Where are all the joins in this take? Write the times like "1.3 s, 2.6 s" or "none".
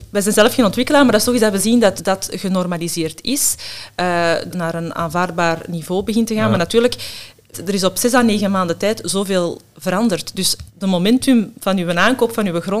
2.0 s, 4.5 s, 7.5 s, 10.7 s